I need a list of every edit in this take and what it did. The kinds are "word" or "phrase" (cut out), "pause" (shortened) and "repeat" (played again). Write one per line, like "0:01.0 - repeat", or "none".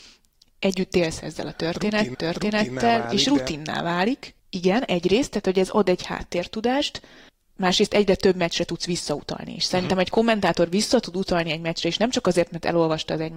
0:02.1 - repeat
0:04.4 - pause
0:07.3 - pause

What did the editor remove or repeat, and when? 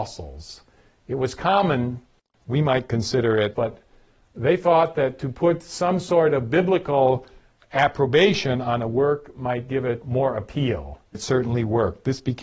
0:03.5 - word
0:11.1 - word

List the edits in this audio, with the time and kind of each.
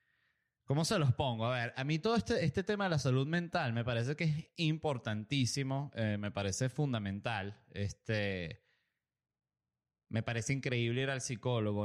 none

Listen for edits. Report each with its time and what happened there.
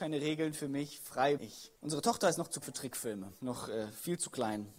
0:01.4 - word
0:01.8 - pause
0:02.6 - word
0:03.4 - pause

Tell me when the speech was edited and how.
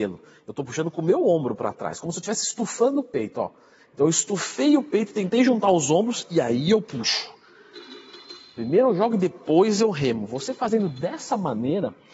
none

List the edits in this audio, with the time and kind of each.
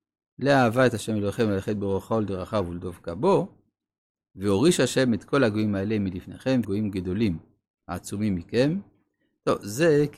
0:06.6 - word

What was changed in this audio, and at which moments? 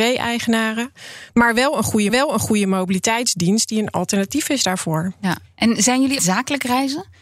0:02.1 - repeat
0:06.2 - phrase

